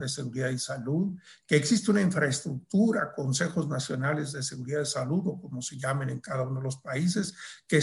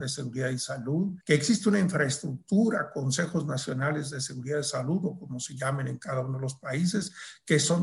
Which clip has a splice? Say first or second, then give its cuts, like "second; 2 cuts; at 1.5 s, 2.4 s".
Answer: second; 1 cut; at 1.2 s